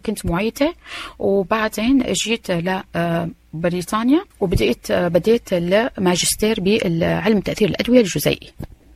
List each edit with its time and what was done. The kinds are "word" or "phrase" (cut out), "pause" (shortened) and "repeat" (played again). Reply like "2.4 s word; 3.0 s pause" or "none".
4.3 s pause